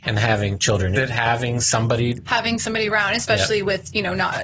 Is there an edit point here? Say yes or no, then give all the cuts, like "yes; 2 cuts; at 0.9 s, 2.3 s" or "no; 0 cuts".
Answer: yes; 1 cut; at 1.0 s